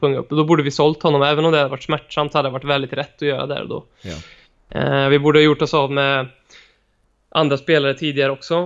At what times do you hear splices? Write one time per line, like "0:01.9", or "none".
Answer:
none